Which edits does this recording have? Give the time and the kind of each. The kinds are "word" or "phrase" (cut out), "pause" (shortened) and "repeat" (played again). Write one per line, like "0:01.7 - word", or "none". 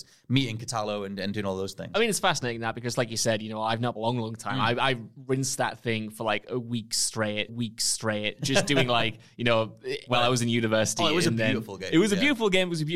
0:04.0 - phrase
0:07.5 - repeat
0:10.1 - phrase